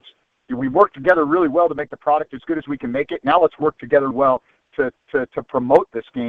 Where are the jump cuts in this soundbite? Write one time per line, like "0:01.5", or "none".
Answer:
0:04.1
0:04.9